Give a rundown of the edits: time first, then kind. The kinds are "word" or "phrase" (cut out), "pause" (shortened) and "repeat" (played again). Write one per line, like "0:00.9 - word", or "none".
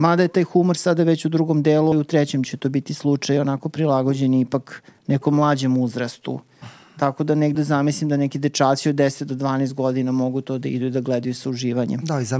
0:01.9 - word
0:02.4 - word
0:07.5 - word